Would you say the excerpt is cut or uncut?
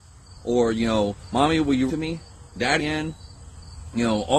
cut